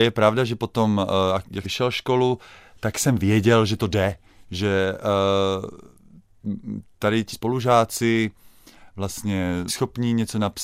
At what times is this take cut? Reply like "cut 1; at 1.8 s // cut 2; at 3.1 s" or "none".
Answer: cut 1; at 1.6 s // cut 2; at 7.3 s // cut 3; at 9.7 s